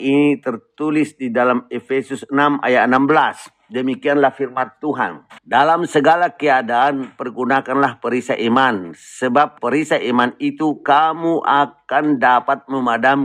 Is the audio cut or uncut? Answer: cut